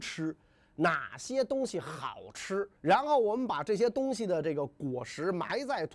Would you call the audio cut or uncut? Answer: cut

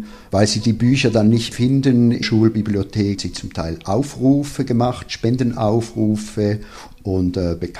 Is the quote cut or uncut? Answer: cut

